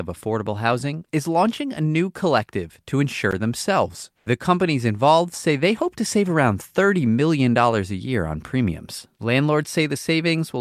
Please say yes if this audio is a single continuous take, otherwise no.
no